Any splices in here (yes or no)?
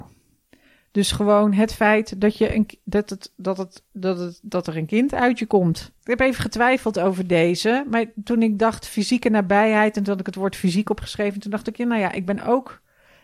no